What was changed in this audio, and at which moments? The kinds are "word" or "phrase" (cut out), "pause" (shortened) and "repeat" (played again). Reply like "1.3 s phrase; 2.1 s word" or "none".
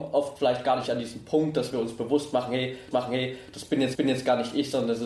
2.9 s repeat; 3.9 s repeat